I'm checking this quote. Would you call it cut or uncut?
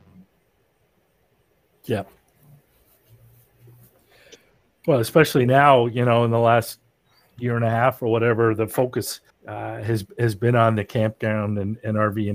cut